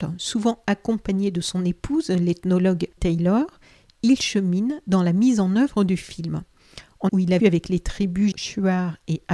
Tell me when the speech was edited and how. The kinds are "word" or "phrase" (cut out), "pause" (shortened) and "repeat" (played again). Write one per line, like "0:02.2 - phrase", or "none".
0:03.0 - word
0:07.1 - word
0:07.4 - word
0:08.3 - word